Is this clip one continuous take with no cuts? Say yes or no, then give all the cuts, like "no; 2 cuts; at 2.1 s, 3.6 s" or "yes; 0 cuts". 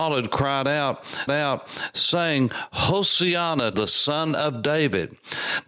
no; 2 cuts; at 1.3 s, 3.7 s